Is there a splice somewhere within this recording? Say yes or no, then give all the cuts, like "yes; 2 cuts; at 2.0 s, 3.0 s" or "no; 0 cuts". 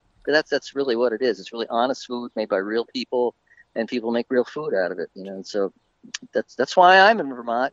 no; 0 cuts